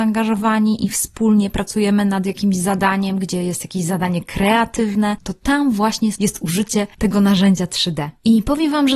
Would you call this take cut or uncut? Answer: uncut